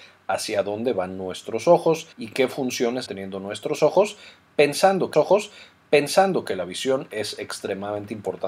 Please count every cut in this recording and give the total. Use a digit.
3